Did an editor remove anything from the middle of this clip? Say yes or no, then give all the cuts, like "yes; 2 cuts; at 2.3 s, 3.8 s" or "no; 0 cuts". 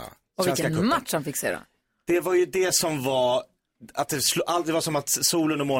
no; 0 cuts